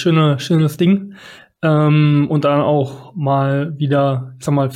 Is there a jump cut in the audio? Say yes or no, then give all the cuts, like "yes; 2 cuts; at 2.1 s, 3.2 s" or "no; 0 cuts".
no; 0 cuts